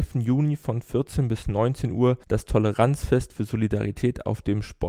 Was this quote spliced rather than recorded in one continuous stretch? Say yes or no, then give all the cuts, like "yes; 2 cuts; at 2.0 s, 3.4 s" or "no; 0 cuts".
yes; 1 cut; at 2.2 s